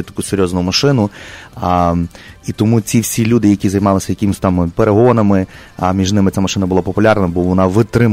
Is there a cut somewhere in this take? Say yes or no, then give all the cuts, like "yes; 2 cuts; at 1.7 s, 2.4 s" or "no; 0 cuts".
no; 0 cuts